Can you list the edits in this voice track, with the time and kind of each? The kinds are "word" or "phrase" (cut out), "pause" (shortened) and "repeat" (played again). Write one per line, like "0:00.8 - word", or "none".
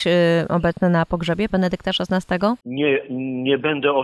0:01.5 - word
0:02.6 - pause